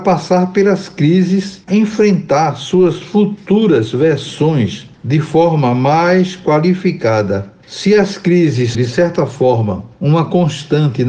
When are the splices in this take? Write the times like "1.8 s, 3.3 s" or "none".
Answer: 1.7 s, 8.7 s